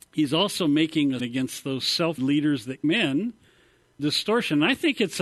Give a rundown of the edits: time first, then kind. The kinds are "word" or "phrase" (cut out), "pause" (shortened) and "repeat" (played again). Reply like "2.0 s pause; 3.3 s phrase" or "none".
1.2 s word; 2.2 s word; 2.8 s word; 4.0 s word